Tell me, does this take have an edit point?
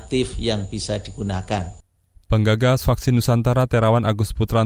no; 0 cuts

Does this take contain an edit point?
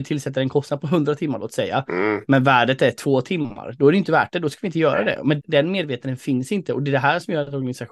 yes; 1 cut; at 5.4 s

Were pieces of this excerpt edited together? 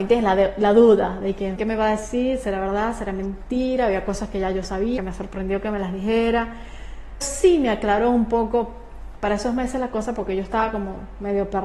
yes; 3 cuts; at 1.6 s, 5.0 s, 7.2 s

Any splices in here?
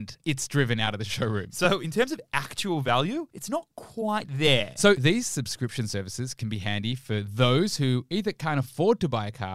no; 0 cuts

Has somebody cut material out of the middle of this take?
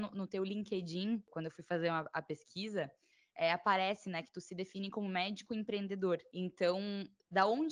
no; 0 cuts

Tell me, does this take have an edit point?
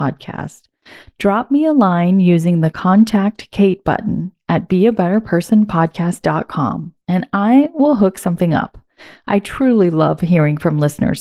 no; 0 cuts

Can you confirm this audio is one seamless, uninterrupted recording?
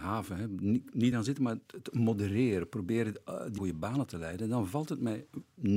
no; 2 cuts; at 1.1 s, 3.6 s

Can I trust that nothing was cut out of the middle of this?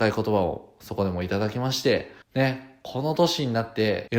no; 1 cut; at 2.2 s

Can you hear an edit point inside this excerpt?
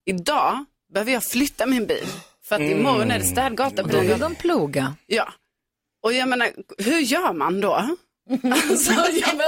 no; 0 cuts

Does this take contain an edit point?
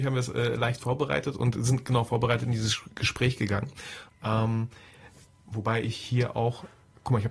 no; 0 cuts

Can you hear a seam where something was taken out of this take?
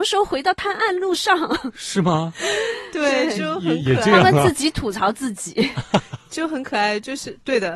no; 0 cuts

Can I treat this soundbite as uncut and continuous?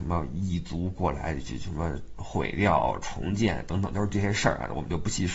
yes; 0 cuts

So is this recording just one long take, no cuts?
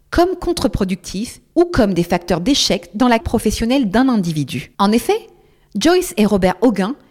no; 2 cuts; at 3.2 s, 4.7 s

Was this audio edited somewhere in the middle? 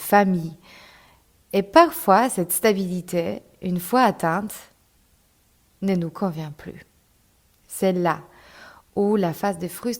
no; 0 cuts

